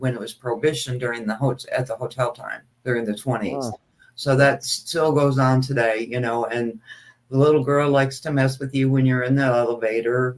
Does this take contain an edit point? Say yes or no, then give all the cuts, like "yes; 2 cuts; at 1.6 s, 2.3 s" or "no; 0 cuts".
yes; 1 cut; at 2.7 s